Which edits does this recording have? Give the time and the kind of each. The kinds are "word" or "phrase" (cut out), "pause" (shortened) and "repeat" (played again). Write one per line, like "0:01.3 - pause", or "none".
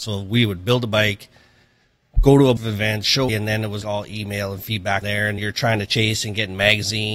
0:02.6 - word
0:03.3 - word
0:03.8 - word
0:05.0 - word
0:05.4 - word